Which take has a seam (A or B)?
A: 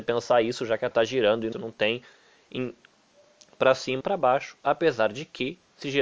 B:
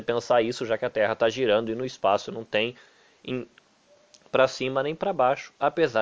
A